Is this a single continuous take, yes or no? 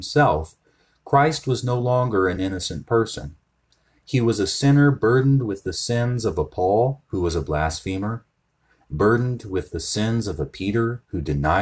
yes